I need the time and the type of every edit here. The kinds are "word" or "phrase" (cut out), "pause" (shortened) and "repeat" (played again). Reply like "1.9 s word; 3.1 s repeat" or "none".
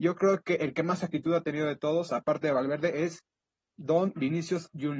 none